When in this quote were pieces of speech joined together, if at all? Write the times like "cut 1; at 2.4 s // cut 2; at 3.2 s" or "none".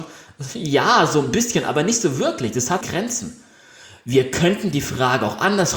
cut 1; at 2.8 s